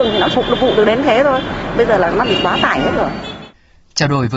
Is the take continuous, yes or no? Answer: yes